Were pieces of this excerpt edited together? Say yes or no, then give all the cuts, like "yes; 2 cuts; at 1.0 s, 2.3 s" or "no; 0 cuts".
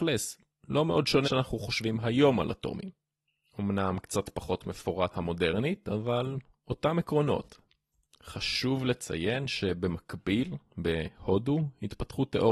yes; 2 cuts; at 1.2 s, 5.1 s